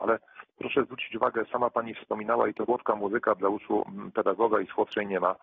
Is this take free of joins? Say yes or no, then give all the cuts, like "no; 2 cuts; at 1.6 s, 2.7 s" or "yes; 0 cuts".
no; 1 cut; at 2.7 s